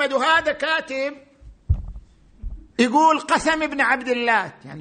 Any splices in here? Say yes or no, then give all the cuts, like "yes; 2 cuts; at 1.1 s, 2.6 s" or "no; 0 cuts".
yes; 1 cut; at 2.7 s